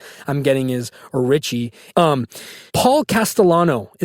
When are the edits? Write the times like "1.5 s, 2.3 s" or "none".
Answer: 1.1 s, 2.7 s